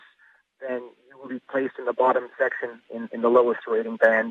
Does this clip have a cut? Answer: no; 0 cuts

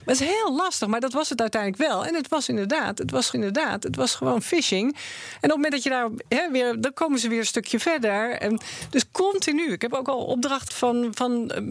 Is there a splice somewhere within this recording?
yes; 2 cuts; at 3.3 s, 10.7 s

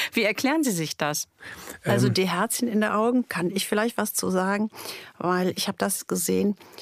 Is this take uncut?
yes; 0 cuts

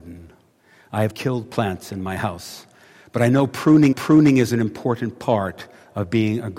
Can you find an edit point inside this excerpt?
yes; 2 cuts; at 1.1 s, 3.9 s

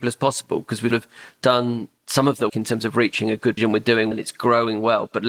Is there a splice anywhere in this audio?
yes; 4 cuts; at 0.9 s, 2.5 s, 3.6 s, 4.1 s

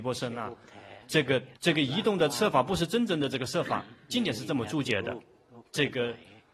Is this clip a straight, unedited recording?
no; 1 cut; at 1.6 s

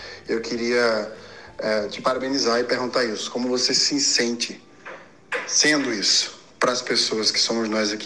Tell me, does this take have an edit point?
no; 0 cuts

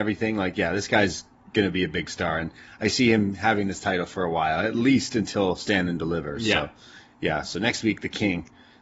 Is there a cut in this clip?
no; 0 cuts

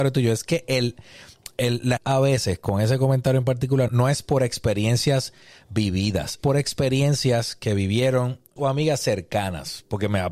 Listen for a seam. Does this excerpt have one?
yes; 4 cuts; at 2.0 s, 3.9 s, 6.4 s, 8.6 s

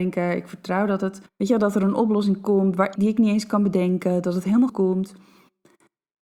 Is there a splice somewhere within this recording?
yes; 3 cuts; at 1.3 s, 3.0 s, 4.7 s

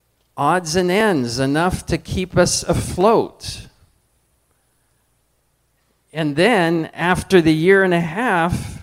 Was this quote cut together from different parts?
no; 0 cuts

